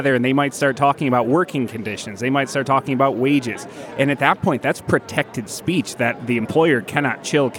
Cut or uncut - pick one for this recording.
uncut